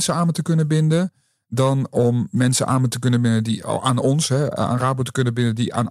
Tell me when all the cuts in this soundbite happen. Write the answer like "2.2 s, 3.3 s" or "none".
none